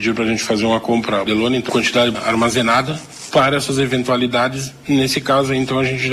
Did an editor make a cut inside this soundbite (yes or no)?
yes